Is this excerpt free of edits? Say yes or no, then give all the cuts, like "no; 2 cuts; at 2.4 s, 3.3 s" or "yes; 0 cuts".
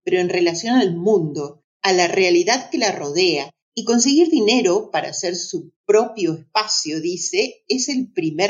no; 3 cuts; at 1.7 s, 3.6 s, 5.8 s